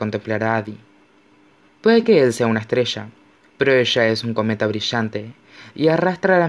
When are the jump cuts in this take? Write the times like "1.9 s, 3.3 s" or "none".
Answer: none